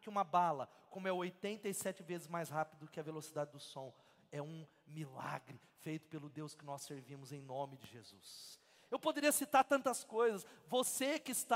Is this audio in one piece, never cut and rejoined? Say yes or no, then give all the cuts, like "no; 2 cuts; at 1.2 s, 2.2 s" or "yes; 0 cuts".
yes; 0 cuts